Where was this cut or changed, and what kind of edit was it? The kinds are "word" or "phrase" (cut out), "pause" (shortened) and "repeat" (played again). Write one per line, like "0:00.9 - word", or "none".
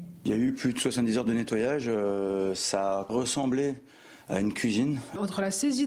0:03.1 - phrase